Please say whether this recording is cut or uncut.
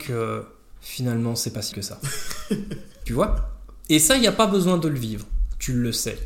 cut